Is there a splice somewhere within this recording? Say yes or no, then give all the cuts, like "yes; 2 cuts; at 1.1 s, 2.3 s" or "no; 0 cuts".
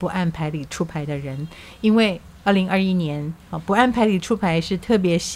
no; 0 cuts